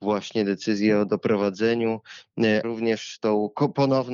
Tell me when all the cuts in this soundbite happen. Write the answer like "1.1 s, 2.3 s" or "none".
2.6 s